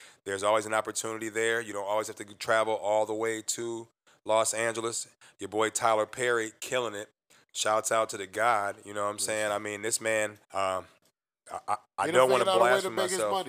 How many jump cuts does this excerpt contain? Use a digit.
1